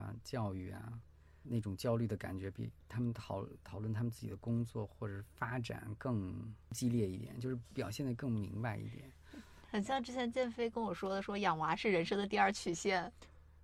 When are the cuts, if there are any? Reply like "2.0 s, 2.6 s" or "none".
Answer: 1.4 s, 2.8 s

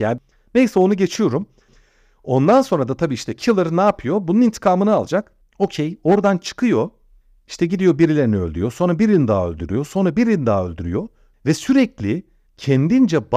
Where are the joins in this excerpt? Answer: none

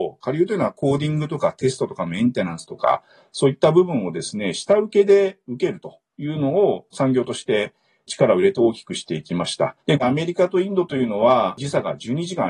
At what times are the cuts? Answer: 9.8 s

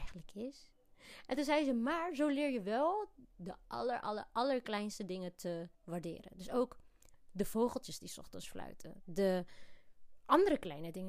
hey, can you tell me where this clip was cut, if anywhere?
5.7 s

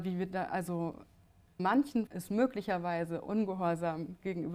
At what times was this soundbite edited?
1.6 s, 2.1 s

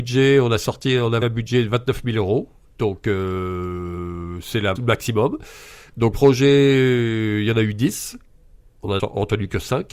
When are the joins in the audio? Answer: 1.2 s, 4.8 s, 6.1 s, 9.0 s

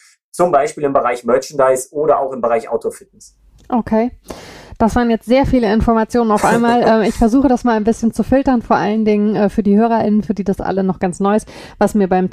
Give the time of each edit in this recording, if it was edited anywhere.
none

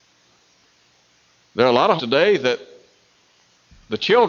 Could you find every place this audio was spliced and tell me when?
2.0 s

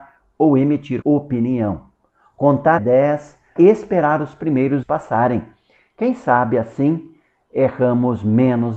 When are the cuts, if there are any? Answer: 1.0 s, 2.8 s, 3.6 s, 4.8 s

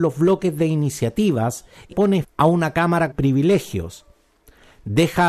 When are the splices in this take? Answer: 1.9 s, 2.2 s, 3.1 s

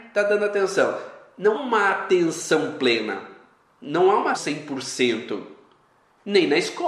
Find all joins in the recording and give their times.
1.5 s, 4.3 s

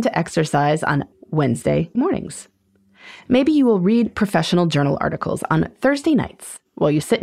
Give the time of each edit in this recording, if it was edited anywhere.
1.1 s, 1.9 s

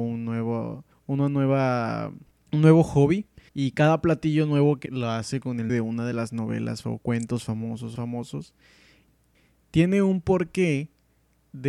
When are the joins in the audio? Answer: 0.9 s, 2.3 s, 3.5 s, 4.9 s, 5.7 s, 6.8 s, 8.0 s

